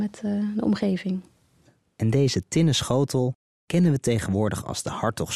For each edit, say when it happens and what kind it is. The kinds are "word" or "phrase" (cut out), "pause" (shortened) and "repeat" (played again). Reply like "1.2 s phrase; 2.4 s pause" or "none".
none